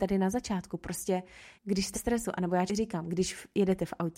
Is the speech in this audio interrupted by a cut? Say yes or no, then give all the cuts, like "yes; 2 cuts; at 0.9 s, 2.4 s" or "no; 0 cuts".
yes; 3 cuts; at 1.6 s, 1.9 s, 2.7 s